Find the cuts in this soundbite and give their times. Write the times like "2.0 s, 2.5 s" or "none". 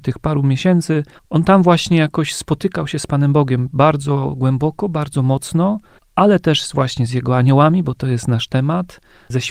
1.2 s, 6.0 s